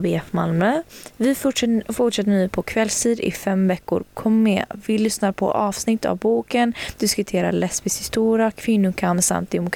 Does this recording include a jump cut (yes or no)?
no